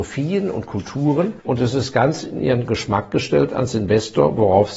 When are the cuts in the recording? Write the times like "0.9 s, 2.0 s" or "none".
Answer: 1.4 s